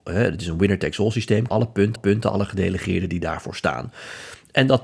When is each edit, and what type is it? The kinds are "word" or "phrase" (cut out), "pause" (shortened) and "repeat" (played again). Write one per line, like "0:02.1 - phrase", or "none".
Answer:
0:01.5 - phrase
0:02.0 - repeat